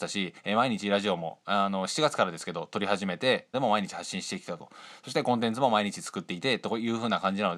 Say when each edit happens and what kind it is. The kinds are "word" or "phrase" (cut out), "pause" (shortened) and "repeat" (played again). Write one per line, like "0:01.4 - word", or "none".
0:03.5 - word